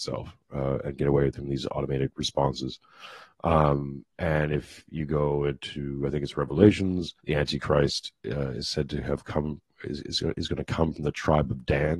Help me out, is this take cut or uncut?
cut